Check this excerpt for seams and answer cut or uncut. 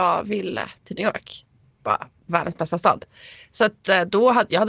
uncut